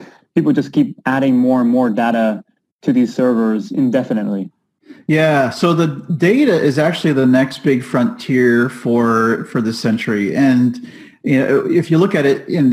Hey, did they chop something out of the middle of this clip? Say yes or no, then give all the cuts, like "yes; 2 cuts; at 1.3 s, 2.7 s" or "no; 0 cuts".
no; 0 cuts